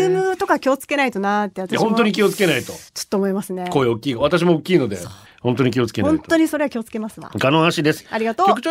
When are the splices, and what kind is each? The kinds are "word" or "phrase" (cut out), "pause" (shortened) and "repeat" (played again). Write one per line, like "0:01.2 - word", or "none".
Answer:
0:05.3 - pause

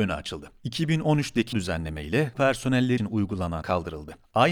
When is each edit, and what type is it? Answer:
0:01.5 - word
0:02.3 - word
0:03.0 - word
0:03.6 - word

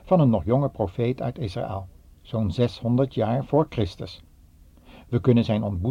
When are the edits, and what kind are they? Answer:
none

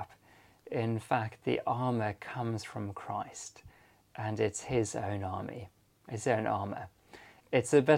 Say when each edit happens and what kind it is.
none

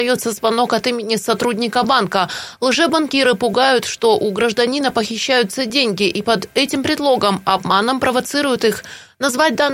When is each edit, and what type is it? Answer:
none

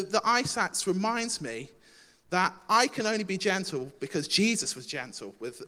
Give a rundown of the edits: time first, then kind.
none

